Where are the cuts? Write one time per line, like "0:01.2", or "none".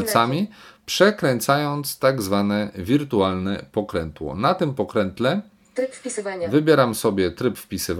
none